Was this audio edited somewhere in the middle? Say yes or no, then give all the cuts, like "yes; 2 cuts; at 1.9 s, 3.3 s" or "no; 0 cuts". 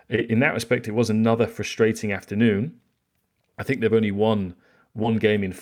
no; 0 cuts